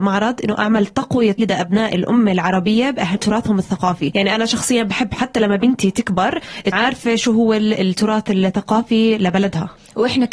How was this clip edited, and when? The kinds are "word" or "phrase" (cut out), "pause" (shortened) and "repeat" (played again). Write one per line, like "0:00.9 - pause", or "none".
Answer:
0:01.4 - word
0:03.2 - word
0:06.7 - word